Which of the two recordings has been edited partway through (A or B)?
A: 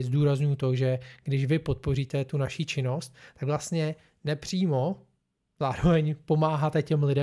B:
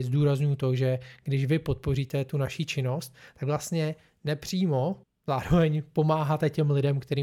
B